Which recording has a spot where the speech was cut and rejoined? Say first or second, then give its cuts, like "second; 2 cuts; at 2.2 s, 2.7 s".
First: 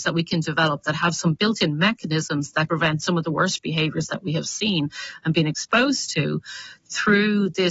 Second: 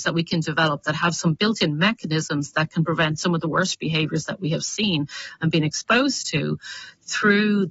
first; 1 cut; at 2.7 s